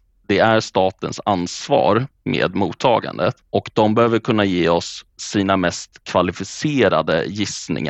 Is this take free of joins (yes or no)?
no